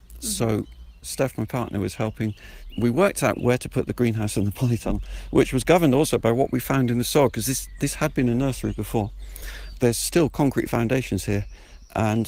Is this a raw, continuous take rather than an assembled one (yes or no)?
yes